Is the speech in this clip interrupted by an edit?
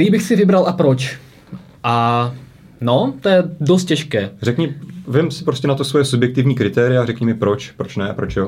no; 0 cuts

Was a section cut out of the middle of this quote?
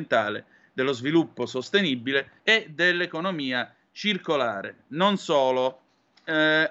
yes; 1 cut; at 2.4 s

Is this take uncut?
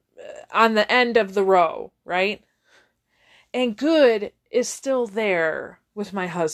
yes; 0 cuts

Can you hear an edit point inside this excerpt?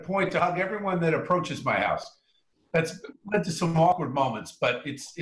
no; 0 cuts

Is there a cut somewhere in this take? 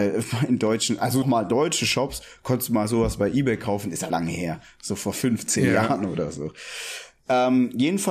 yes; 2 cuts; at 1.2 s, 4.1 s

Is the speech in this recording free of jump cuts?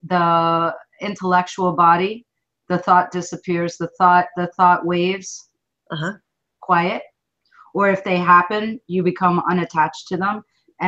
yes; 0 cuts

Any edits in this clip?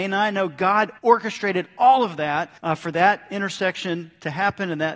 yes; 2 cuts; at 1.0 s, 2.6 s

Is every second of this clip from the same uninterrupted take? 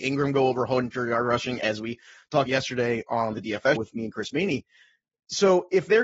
no; 3 cuts; at 2.5 s, 3.3 s, 3.8 s

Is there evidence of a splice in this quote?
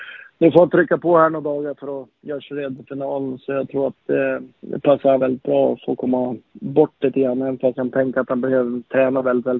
yes; 3 cuts; at 4.5 s, 5.2 s, 7.8 s

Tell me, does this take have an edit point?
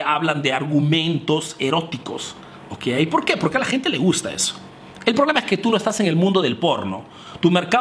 no; 0 cuts

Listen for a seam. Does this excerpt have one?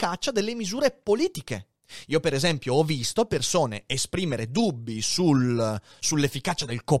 no; 0 cuts

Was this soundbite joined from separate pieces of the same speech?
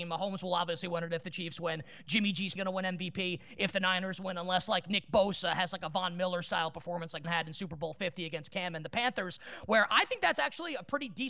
yes; 2 cuts; at 2.6 s, 7.2 s

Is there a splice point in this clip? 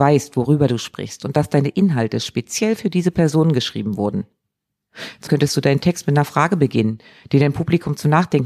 yes; 1 cut; at 5.3 s

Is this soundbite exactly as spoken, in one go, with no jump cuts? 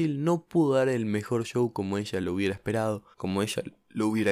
no; 1 cut; at 3.1 s

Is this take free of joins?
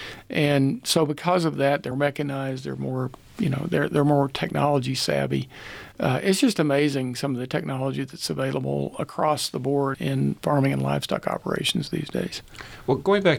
no; 2 cuts; at 1.9 s, 9.9 s

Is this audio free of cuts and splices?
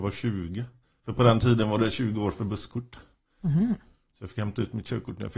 yes; 0 cuts

